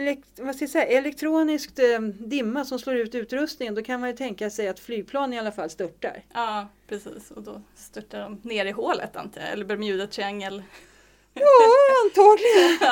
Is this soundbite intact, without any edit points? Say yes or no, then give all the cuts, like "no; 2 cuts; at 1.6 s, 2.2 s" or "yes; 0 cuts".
yes; 0 cuts